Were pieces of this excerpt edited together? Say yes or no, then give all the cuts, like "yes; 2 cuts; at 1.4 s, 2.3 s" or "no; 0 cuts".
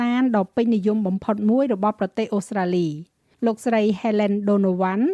no; 0 cuts